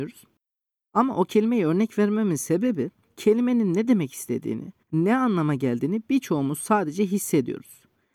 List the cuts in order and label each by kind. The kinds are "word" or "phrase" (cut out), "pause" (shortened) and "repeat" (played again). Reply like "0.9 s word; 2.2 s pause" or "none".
3.0 s pause; 4.8 s pause